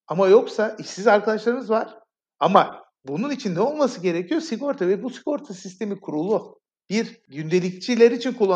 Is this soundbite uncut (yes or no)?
yes